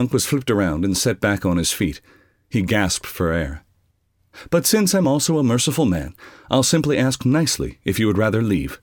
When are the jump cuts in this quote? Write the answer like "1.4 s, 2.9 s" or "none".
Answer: none